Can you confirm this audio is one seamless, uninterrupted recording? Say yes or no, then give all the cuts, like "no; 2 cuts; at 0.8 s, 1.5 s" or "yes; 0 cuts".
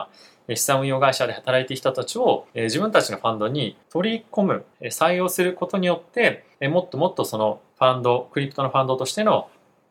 no; 5 cuts; at 2.5 s, 3.8 s, 4.7 s, 6.5 s, 7.7 s